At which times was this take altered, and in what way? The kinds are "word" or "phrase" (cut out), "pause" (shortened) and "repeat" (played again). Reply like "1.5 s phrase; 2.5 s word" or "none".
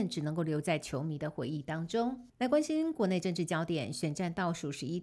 2.3 s pause